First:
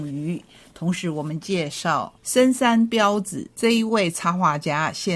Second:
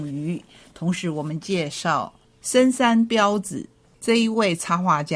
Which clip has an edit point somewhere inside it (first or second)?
first